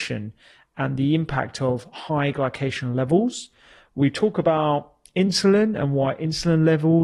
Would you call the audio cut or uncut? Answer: uncut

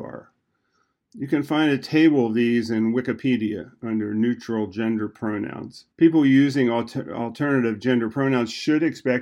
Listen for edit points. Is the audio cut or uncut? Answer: cut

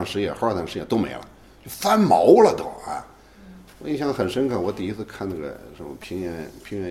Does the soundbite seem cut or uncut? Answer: uncut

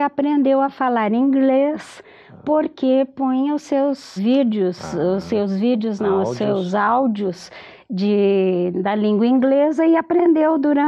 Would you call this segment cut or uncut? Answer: cut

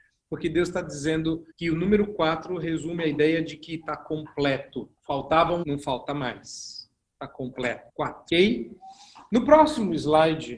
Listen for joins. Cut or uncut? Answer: cut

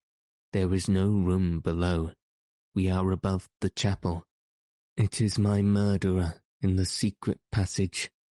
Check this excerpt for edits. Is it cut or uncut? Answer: uncut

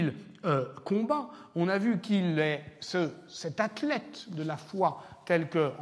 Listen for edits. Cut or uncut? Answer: uncut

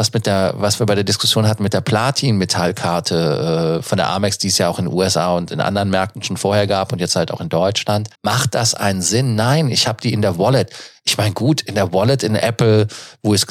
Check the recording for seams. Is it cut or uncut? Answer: cut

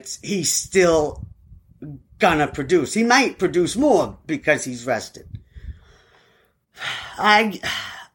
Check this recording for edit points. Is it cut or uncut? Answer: uncut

